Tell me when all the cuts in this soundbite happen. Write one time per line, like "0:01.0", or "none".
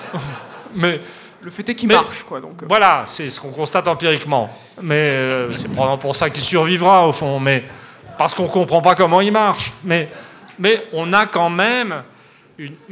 0:01.3